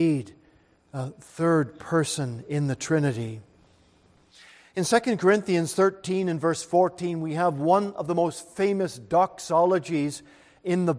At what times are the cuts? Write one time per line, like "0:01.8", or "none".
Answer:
none